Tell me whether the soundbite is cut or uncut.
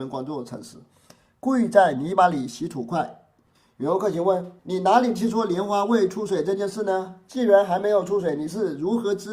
cut